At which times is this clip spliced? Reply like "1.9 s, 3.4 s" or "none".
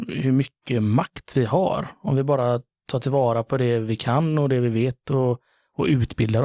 none

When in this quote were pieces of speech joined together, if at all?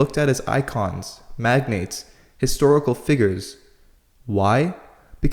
none

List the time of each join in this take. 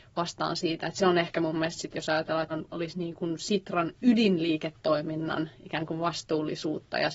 1.9 s, 2.5 s

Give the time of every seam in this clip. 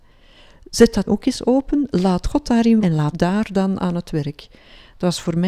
1.1 s, 2.8 s, 3.1 s

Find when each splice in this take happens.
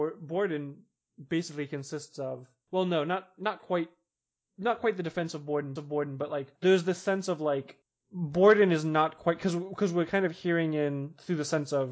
5.8 s, 6.5 s

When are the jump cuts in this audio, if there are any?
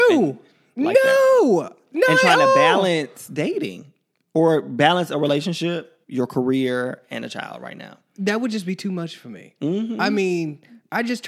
6.0 s

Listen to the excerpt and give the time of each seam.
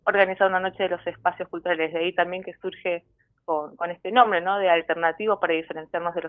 none

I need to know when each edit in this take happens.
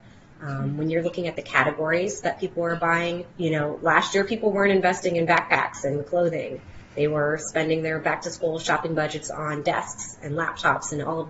3.3 s

